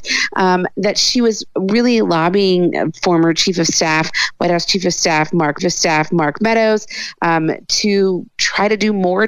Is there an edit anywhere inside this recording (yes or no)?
yes